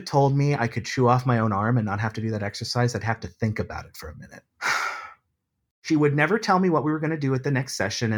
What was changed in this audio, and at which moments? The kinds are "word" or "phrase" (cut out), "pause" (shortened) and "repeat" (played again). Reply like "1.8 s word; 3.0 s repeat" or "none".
4.5 s pause